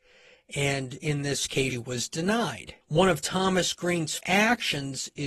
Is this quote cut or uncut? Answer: cut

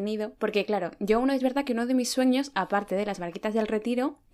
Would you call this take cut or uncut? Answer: uncut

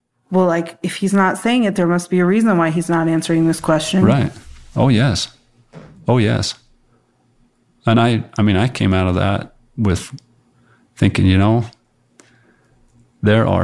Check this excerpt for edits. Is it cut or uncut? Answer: uncut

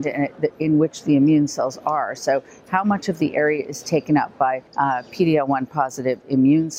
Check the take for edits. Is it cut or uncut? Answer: cut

